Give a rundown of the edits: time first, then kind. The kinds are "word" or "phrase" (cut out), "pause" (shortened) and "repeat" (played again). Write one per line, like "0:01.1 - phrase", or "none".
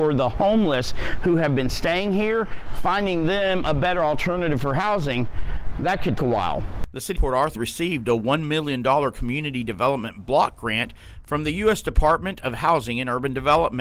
0:06.2 - word
0:07.1 - word
0:07.5 - word